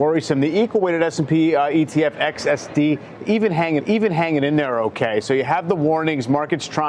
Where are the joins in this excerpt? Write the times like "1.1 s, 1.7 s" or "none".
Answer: 3.8 s